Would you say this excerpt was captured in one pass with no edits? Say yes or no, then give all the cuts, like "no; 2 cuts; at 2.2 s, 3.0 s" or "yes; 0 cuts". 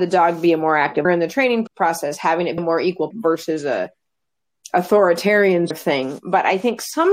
no; 5 cuts; at 1.0 s, 1.7 s, 2.6 s, 3.1 s, 5.7 s